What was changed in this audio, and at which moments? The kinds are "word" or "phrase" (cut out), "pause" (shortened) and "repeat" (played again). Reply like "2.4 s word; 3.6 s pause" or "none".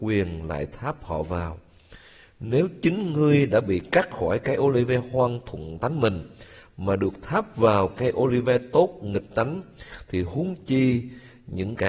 none